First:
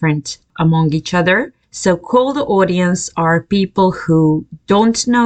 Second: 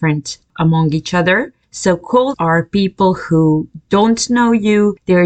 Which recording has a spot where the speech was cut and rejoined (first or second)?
second